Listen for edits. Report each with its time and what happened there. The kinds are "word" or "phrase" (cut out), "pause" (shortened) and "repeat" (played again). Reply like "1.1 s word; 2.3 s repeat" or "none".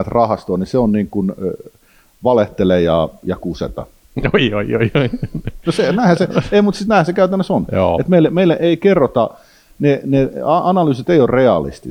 none